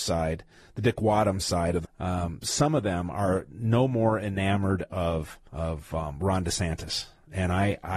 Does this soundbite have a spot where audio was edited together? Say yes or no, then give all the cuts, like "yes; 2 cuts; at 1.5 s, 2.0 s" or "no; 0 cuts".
yes; 2 cuts; at 1.8 s, 5.5 s